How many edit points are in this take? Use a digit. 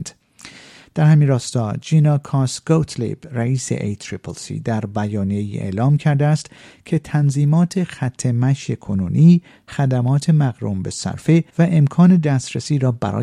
1